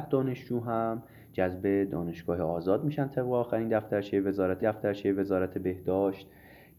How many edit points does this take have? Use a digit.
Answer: 1